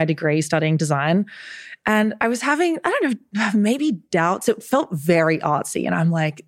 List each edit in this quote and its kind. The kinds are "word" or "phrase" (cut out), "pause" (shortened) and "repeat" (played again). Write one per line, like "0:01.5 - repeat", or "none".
0:04.0 - pause

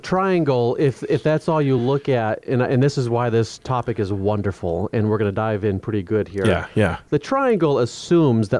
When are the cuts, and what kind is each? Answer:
none

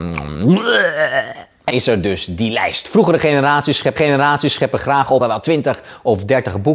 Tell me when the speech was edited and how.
0:01.7 - word
0:04.0 - repeat
0:05.2 - phrase

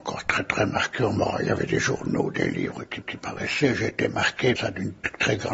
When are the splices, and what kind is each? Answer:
0:03.0 - repeat
0:04.6 - word

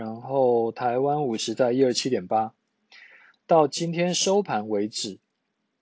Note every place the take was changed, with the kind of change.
none

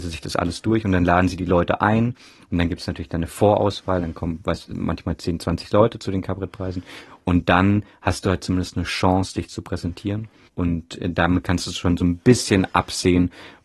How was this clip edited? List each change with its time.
none

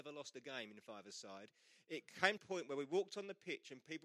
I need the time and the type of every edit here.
0:02.4 - phrase

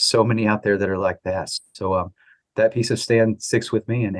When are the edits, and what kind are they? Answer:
none

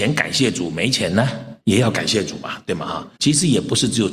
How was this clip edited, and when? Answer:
0:01.6 - pause
0:03.2 - pause

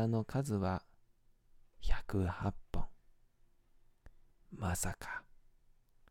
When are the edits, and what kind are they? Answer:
0:04.3 - pause

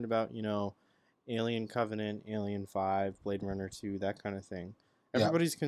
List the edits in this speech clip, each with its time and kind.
none

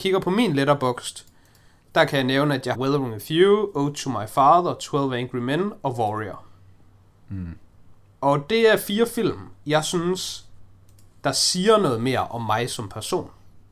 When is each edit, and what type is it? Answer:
0:02.7 - word

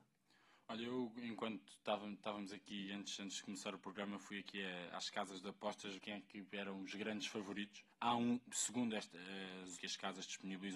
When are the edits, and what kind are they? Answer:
0:06.0 - word
0:07.9 - pause
0:09.8 - phrase

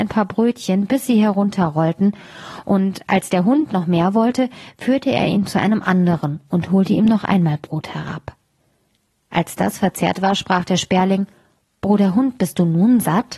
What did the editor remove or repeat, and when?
none

